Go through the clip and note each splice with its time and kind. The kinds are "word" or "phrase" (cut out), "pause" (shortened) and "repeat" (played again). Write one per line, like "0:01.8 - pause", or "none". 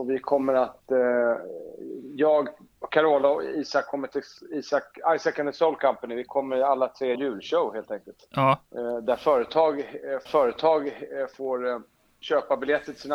0:07.1 - phrase
0:08.7 - pause
0:10.3 - repeat